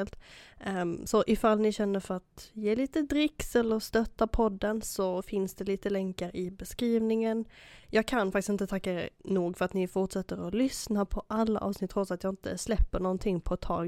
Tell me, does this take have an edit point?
no; 0 cuts

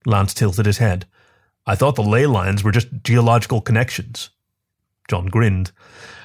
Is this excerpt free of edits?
yes; 0 cuts

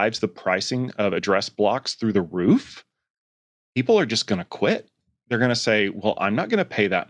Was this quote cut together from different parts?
no; 0 cuts

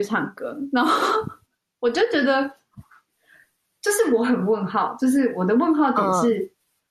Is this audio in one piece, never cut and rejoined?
yes; 0 cuts

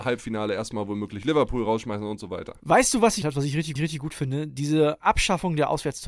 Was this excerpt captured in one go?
no; 2 cuts; at 3.2 s, 3.8 s

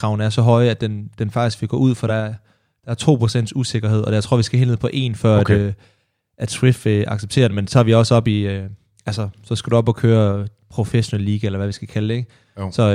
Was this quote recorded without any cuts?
yes; 0 cuts

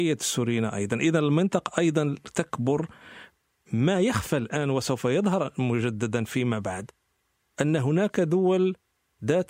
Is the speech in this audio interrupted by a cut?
no; 0 cuts

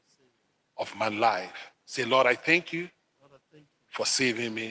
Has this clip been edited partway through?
yes; 1 cut; at 1.8 s

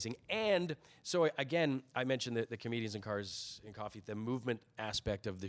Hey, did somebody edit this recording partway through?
no; 0 cuts

